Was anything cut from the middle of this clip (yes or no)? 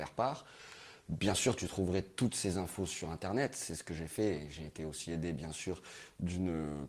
no